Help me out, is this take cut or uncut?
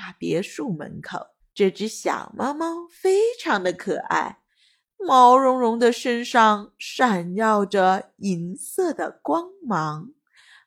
cut